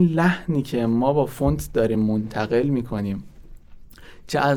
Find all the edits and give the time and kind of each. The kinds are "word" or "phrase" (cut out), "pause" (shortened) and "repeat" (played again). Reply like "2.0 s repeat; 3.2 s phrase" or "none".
none